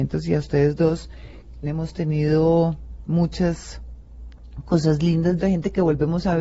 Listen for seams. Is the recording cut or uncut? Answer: cut